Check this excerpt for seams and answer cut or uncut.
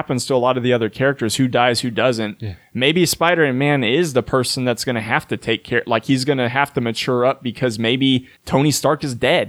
cut